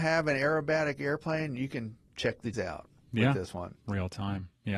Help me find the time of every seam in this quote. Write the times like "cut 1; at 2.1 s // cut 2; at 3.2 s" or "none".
cut 1; at 2.0 s // cut 2; at 2.5 s